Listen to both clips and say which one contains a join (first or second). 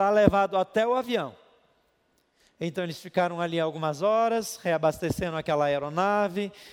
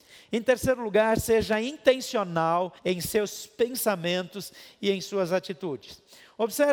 second